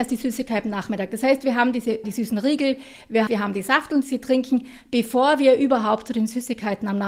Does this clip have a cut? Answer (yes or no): yes